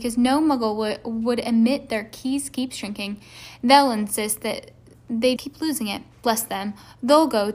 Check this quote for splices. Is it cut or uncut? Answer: cut